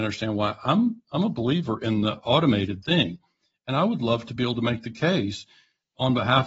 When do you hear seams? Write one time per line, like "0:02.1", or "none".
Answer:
none